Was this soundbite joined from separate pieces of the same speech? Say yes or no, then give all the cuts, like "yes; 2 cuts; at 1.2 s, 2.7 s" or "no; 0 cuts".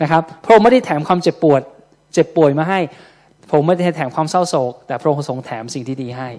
no; 0 cuts